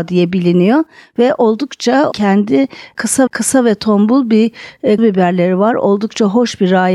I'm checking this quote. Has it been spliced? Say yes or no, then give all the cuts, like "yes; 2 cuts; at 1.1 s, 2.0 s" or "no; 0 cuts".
yes; 3 cuts; at 2.1 s, 3.3 s, 5.0 s